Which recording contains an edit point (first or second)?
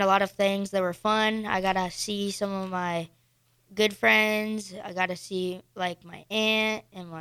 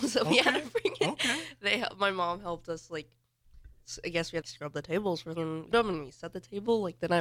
second